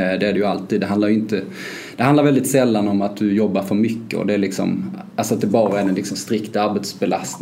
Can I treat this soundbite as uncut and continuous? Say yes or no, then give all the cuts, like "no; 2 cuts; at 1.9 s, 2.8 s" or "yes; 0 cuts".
yes; 0 cuts